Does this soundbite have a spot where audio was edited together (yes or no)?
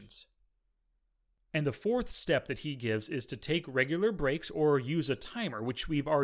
no